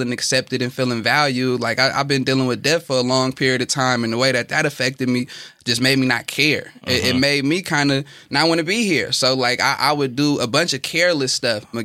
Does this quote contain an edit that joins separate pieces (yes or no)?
no